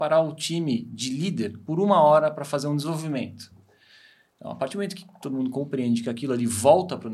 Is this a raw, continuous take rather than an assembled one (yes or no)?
yes